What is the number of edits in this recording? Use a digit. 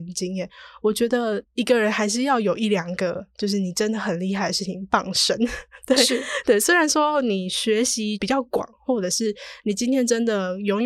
1